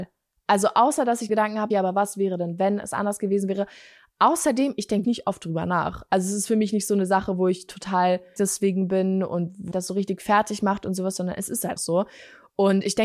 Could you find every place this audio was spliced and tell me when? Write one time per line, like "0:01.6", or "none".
0:01.3
0:01.7
0:05.0
0:08.4
0:09.7
0:11.8